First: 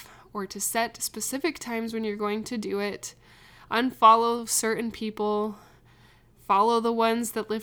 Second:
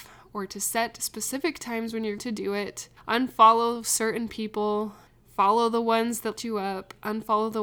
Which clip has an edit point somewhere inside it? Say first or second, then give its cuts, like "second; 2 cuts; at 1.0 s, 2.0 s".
second; 4 cuts; at 2.2 s, 3.0 s, 5.1 s, 6.4 s